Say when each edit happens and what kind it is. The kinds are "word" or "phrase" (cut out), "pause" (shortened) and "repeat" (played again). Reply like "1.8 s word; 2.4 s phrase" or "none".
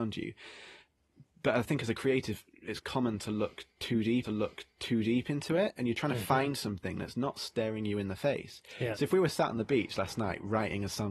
2.8 s word; 4.2 s repeat